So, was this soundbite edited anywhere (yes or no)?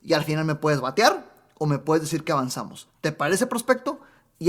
no